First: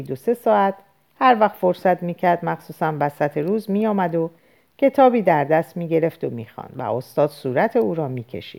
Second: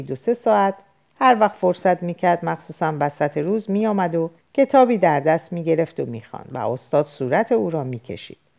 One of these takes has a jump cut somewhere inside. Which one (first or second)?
second